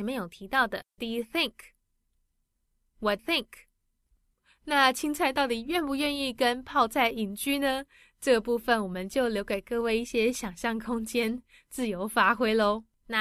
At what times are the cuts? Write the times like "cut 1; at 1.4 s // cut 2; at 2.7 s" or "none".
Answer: cut 1; at 1.0 s // cut 2; at 3.2 s